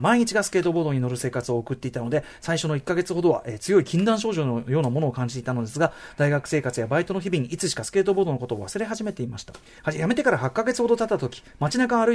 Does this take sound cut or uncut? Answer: cut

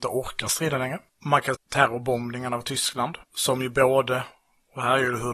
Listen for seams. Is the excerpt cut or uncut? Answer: cut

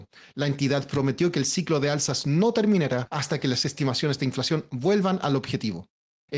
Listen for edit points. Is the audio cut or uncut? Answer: uncut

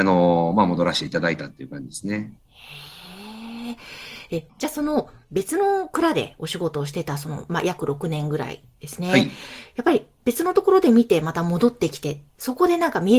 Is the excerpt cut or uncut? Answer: cut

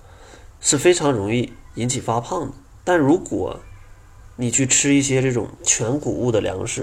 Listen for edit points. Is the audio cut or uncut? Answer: uncut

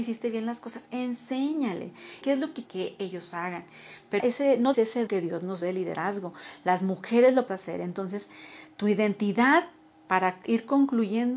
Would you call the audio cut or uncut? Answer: cut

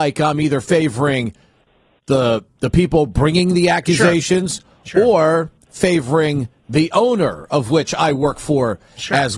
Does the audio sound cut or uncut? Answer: uncut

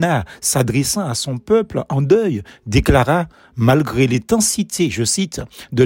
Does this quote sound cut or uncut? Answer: uncut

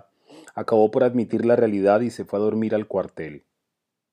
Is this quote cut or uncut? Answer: uncut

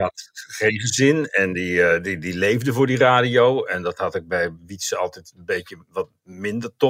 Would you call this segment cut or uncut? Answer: uncut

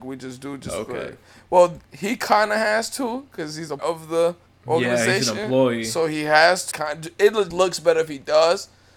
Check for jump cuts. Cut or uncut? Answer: cut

